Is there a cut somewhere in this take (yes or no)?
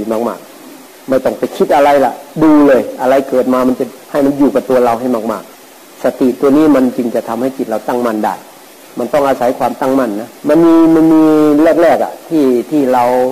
yes